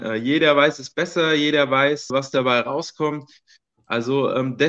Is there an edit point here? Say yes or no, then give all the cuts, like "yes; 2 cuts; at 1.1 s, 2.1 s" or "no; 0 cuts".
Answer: yes; 1 cut; at 2.1 s